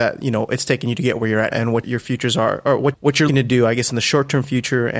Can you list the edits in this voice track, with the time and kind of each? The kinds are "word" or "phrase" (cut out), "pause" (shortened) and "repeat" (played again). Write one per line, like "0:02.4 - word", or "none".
0:01.5 - word
0:01.8 - word
0:02.9 - word
0:03.3 - word

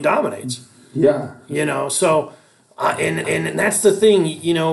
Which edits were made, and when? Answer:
0:03.2 - repeat

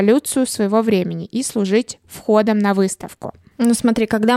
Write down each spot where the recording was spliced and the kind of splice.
none

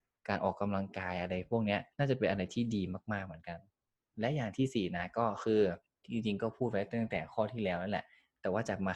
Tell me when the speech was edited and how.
0:01.9 - pause
0:06.0 - pause

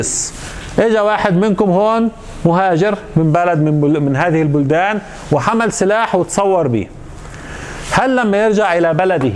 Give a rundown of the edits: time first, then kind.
none

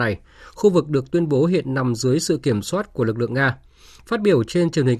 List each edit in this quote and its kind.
none

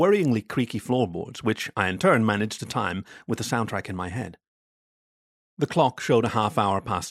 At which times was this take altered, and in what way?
none

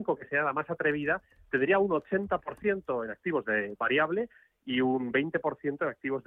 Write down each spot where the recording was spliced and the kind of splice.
0:03.8 - word

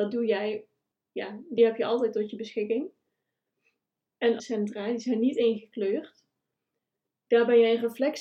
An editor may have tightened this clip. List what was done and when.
0:00.9 - word
0:01.6 - word
0:04.4 - phrase

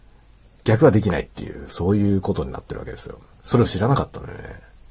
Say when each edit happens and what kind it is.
0:03.3 - pause

